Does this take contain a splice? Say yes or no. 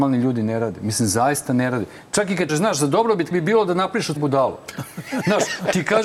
yes